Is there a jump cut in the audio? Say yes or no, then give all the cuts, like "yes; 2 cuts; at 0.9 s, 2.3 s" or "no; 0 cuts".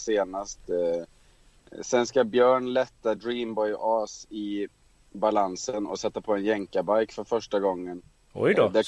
no; 0 cuts